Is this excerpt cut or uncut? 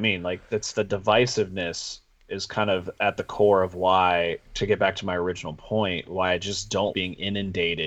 cut